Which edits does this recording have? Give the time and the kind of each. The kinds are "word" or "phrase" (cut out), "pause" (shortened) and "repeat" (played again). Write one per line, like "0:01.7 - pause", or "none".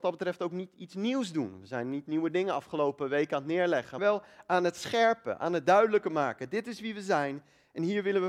0:04.0 - word